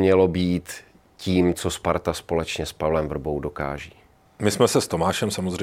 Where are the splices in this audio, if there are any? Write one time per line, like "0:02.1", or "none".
none

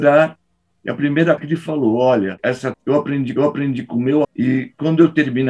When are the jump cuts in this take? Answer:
0:01.4
0:02.7
0:03.4
0:04.2

